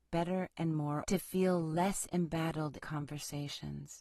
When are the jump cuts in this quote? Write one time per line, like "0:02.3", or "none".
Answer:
0:01.1
0:02.8